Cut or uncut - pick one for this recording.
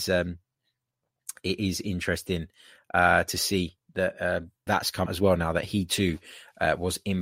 cut